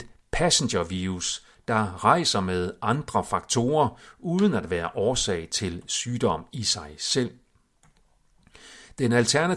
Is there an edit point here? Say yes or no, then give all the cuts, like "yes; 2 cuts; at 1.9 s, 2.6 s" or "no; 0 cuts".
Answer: no; 0 cuts